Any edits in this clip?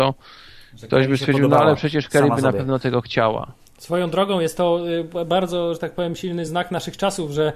no; 0 cuts

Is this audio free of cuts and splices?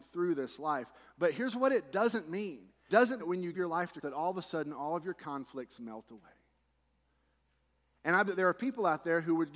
no; 5 cuts; at 2.9 s, 3.2 s, 3.5 s, 4.0 s, 8.3 s

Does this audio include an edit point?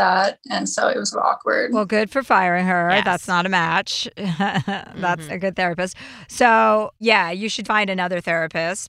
yes; 3 cuts; at 1.1 s, 5.3 s, 7.6 s

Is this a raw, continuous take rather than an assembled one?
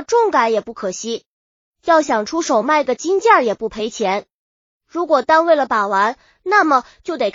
yes; 0 cuts

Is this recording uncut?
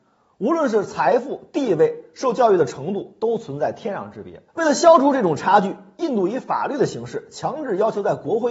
no; 1 cut; at 4.5 s

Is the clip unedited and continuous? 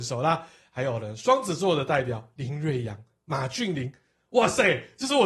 yes; 0 cuts

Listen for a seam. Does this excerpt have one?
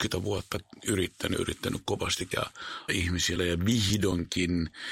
yes; 4 cuts; at 1.3 s, 2.3 s, 2.9 s, 3.4 s

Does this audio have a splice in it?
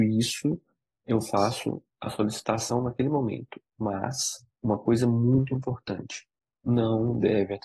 yes; 1 cut; at 4.5 s

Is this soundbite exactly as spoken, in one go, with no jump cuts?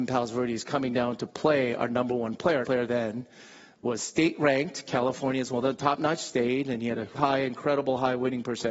no; 2 cuts; at 2.6 s, 7.1 s

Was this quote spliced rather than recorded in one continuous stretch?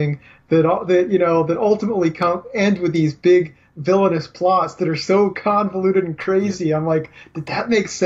no; 0 cuts

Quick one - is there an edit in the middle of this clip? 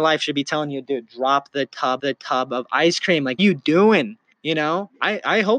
yes; 3 cuts; at 2.0 s, 3.4 s, 4.3 s

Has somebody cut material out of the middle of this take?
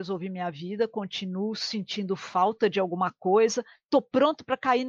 no; 0 cuts

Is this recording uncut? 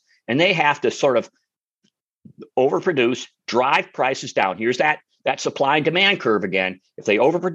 yes; 0 cuts

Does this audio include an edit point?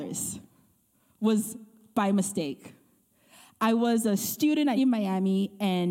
yes; 1 cut; at 4.8 s

